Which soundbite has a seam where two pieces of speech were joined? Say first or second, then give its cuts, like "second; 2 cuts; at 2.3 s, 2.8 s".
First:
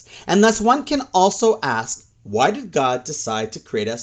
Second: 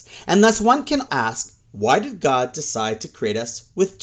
second; 1 cut; at 1.1 s